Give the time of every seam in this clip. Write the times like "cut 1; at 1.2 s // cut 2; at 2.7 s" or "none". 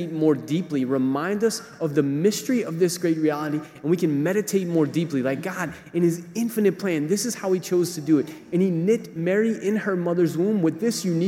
none